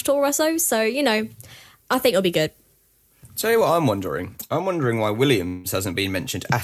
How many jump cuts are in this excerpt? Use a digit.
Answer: 0